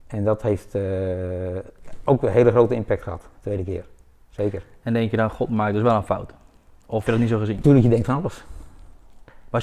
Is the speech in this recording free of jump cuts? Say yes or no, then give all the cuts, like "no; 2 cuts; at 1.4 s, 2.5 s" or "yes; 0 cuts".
no; 1 cut; at 7.1 s